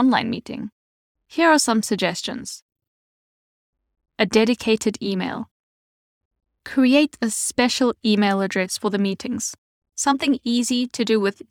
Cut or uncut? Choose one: uncut